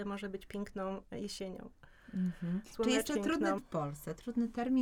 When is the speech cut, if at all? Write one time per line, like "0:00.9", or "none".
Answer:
0:03.1
0:03.6